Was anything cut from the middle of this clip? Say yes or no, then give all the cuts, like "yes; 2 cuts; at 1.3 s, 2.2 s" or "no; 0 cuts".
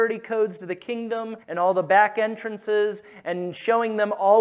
yes; 1 cut; at 1.4 s